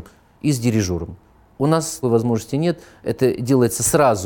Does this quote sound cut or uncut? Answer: cut